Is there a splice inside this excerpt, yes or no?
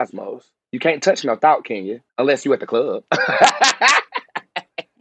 yes